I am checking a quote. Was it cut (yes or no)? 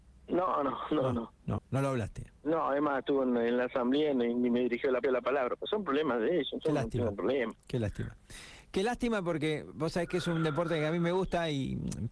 yes